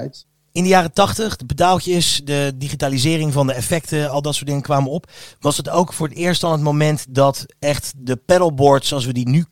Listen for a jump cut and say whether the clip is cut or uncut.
uncut